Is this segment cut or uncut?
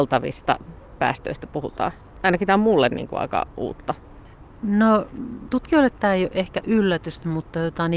uncut